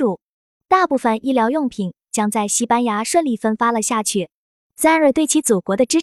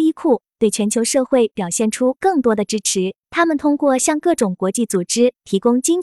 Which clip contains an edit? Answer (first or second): second